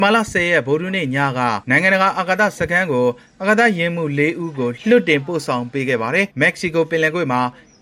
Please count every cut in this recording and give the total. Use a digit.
2